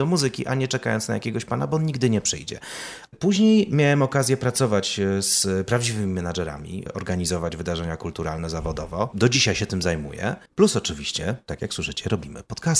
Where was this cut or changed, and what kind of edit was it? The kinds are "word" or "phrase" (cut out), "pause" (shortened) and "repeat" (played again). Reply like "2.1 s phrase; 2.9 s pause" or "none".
10.5 s pause